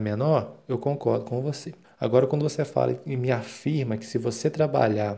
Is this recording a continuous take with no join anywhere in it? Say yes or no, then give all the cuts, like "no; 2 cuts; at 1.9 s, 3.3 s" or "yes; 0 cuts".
no; 1 cut; at 1.8 s